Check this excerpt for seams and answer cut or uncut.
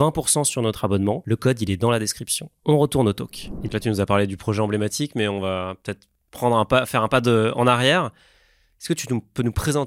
uncut